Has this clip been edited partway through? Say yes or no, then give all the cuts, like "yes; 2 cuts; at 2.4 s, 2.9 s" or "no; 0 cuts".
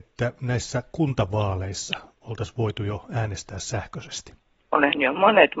no; 0 cuts